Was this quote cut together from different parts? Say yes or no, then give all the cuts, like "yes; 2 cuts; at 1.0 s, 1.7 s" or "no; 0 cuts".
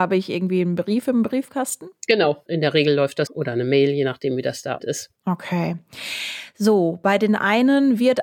yes; 2 cuts; at 3.3 s, 4.8 s